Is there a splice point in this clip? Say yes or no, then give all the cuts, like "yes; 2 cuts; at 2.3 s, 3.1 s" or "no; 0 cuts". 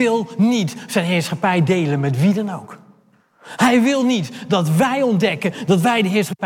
no; 0 cuts